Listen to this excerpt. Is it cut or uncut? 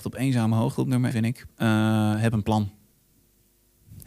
cut